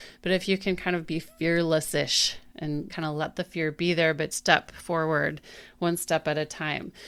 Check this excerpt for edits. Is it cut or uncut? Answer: cut